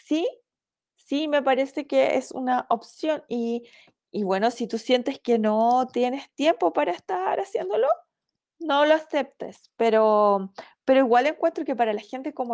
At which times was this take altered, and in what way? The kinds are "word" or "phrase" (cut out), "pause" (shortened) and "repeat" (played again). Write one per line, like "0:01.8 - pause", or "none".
0:08.3 - pause